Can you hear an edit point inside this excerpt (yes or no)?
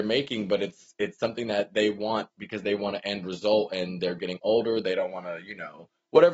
no